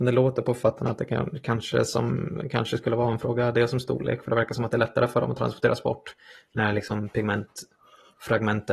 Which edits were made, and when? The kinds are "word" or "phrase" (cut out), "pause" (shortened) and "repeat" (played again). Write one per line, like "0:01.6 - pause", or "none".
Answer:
none